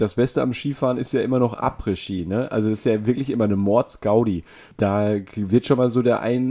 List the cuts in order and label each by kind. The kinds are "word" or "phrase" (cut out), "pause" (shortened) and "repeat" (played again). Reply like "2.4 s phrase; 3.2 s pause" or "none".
none